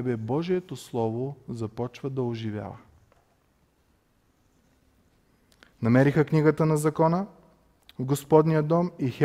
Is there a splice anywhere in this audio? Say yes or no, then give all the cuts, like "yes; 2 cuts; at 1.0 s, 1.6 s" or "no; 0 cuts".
no; 0 cuts